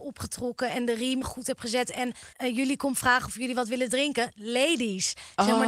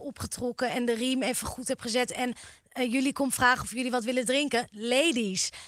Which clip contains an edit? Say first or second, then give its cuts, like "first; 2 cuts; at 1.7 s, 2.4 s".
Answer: first; 2 cuts; at 1.2 s, 2.3 s